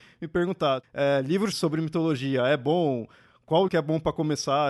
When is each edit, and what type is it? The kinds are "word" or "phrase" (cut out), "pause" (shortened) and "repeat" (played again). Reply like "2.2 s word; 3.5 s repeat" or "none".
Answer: 1.5 s word; 3.7 s word